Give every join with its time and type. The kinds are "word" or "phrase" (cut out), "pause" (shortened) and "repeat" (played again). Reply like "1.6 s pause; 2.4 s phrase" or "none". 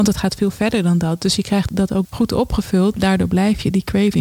1.7 s word; 2.0 s word; 2.9 s word